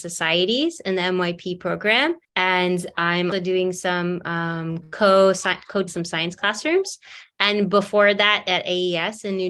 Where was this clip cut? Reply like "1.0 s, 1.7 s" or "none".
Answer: 2.2 s, 3.3 s, 5.9 s